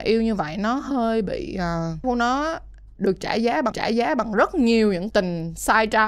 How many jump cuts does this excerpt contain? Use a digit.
3